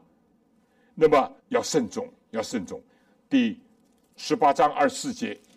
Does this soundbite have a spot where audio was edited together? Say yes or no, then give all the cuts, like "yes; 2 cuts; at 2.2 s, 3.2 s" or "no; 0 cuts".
yes; 1 cut; at 1.4 s